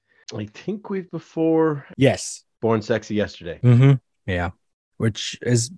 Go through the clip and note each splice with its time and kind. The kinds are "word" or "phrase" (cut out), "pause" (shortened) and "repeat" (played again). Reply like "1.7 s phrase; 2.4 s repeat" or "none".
1.1 s word